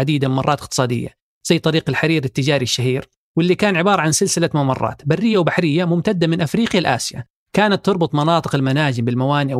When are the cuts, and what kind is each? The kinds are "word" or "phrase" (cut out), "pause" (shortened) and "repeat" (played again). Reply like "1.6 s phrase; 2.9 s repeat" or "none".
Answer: none